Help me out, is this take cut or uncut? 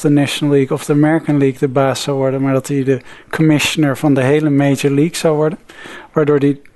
uncut